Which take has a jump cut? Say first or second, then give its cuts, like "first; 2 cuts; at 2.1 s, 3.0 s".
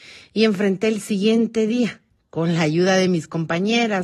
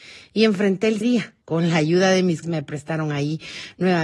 second; 3 cuts; at 1.0 s, 1.4 s, 2.4 s